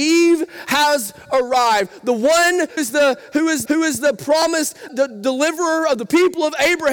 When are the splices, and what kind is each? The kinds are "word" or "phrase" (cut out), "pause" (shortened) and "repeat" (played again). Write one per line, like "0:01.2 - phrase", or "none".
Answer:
0:02.8 - word
0:03.7 - repeat
0:04.9 - word